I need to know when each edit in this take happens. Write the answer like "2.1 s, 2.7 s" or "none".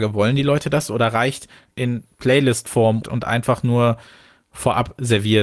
1.7 s, 3.0 s